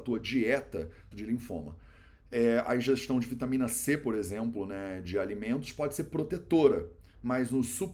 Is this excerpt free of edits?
no; 1 cut; at 1.1 s

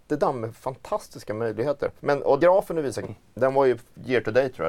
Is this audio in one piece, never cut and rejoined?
no; 3 cuts; at 2.0 s, 2.4 s, 3.0 s

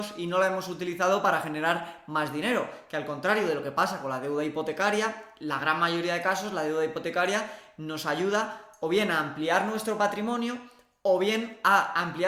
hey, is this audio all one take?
yes; 0 cuts

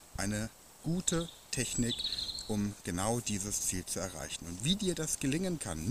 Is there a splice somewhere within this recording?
no; 0 cuts

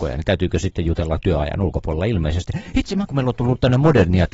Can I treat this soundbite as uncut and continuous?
no; 1 cut; at 3.1 s

